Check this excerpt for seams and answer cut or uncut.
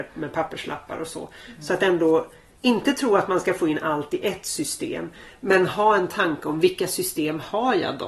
uncut